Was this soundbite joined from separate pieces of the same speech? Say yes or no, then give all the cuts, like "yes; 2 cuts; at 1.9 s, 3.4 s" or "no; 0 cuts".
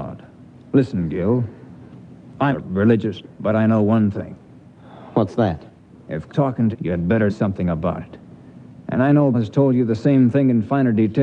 yes; 6 cuts; at 2.5 s, 3.2 s, 6.3 s, 6.7 s, 7.3 s, 9.3 s